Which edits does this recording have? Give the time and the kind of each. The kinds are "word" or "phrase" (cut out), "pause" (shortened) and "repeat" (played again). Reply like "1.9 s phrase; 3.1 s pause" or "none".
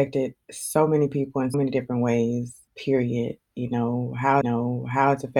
1.5 s word; 2.7 s pause; 4.4 s repeat